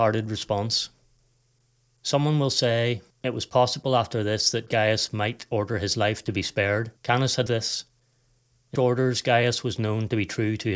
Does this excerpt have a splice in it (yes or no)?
yes